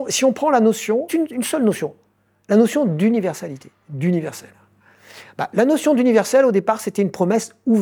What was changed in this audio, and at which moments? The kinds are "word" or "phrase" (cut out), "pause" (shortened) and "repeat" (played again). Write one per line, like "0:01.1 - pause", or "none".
0:01.1 - word

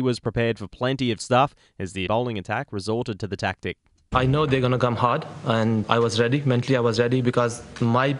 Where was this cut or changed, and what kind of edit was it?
0:01.2 - word
0:02.1 - word
0:05.8 - word

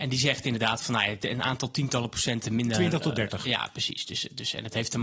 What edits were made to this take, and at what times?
none

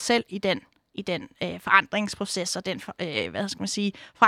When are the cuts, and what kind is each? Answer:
none

